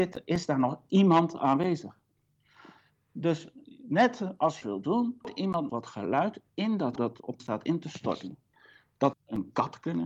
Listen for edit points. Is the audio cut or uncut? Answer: cut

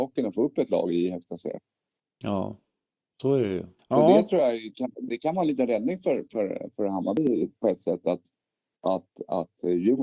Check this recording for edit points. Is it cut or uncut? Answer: uncut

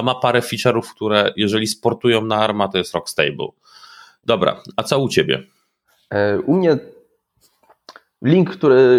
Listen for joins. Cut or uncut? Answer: uncut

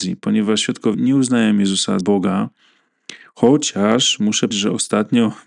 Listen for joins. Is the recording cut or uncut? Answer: cut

